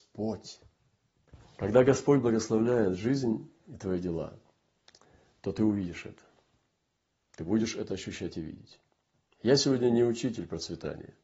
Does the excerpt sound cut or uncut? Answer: uncut